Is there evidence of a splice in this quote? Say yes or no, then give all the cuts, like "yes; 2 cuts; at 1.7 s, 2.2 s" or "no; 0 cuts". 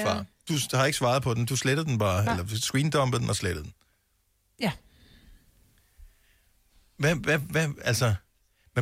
no; 0 cuts